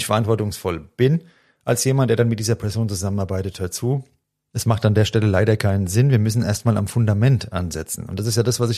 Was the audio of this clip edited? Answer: no; 0 cuts

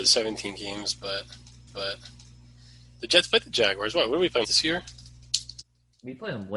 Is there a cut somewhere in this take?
yes; 2 cuts; at 1.7 s, 4.4 s

